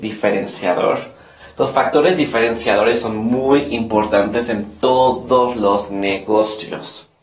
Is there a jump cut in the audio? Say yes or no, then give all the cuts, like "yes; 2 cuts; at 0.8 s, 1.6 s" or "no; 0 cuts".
no; 0 cuts